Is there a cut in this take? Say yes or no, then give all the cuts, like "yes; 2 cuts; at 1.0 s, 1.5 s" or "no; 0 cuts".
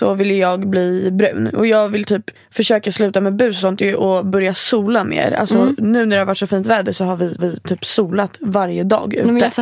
yes; 2 cuts; at 2.4 s, 7.4 s